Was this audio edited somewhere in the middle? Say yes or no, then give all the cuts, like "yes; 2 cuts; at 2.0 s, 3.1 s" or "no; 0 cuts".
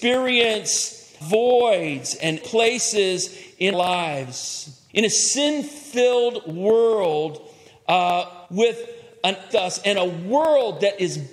yes; 6 cuts; at 1.2 s, 2.4 s, 3.7 s, 4.9 s, 8.5 s, 9.5 s